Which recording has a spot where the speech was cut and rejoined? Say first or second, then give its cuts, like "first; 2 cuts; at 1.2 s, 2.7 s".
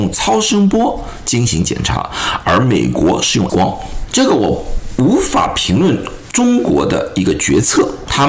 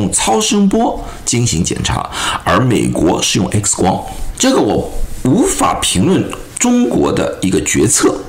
first; 1 cut; at 3.5 s